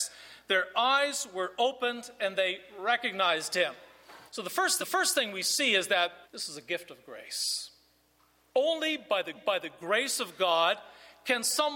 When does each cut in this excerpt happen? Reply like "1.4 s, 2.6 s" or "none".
4.3 s, 4.8 s, 6.2 s, 9.3 s